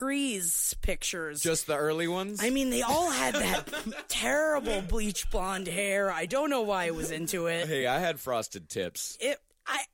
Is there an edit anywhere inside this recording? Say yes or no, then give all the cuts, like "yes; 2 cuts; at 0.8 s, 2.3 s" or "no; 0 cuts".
no; 0 cuts